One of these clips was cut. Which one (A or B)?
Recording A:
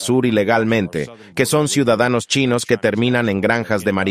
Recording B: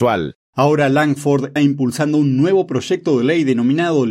B